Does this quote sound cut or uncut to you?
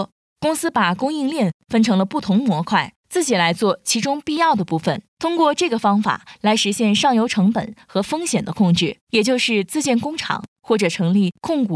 cut